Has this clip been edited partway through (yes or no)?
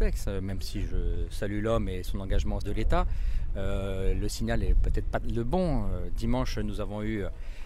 yes